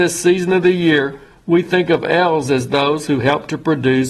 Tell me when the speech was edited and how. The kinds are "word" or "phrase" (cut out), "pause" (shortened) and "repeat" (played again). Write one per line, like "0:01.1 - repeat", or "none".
none